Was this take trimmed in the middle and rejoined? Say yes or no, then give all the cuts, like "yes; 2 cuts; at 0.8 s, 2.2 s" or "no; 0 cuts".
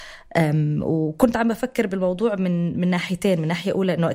no; 0 cuts